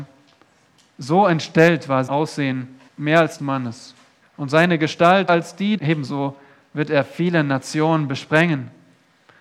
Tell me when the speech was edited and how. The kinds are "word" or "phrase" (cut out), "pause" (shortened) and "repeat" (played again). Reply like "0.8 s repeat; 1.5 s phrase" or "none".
2.1 s word; 2.9 s pause; 3.4 s phrase; 4.2 s pause; 5.3 s word; 5.8 s phrase